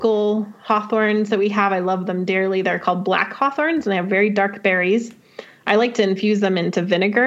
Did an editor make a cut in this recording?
no; 0 cuts

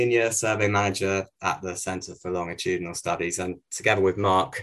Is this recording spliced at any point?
no; 0 cuts

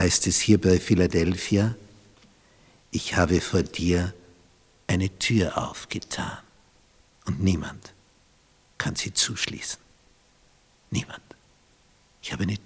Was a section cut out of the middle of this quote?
no; 0 cuts

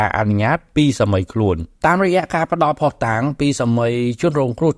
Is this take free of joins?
no; 1 cut; at 1.7 s

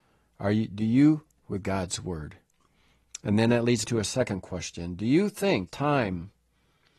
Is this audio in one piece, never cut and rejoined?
no; 3 cuts; at 1.4 s, 3.8 s, 5.7 s

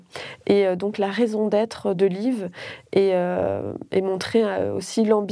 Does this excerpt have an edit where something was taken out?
no; 0 cuts

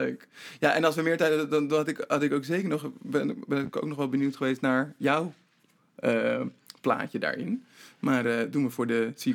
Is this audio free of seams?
yes; 0 cuts

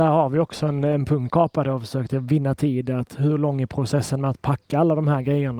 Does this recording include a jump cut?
yes; 1 cut; at 1.3 s

